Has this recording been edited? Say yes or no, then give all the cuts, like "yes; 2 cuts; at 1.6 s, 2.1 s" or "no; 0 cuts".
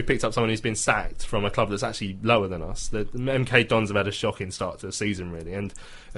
no; 0 cuts